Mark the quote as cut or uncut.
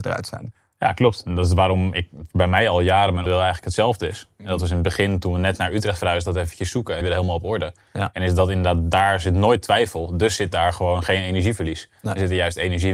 cut